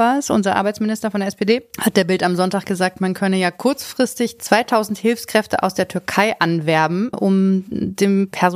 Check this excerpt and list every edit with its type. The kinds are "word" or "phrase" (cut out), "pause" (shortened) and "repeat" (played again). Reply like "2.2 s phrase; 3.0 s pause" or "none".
7.1 s word